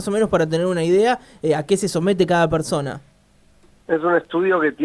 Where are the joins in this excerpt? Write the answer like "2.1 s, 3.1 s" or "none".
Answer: none